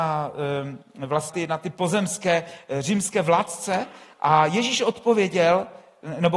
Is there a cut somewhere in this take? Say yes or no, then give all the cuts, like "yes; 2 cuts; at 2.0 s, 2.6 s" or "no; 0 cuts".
yes; 1 cut; at 1.3 s